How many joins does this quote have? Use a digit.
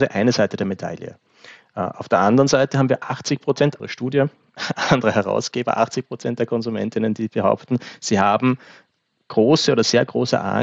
1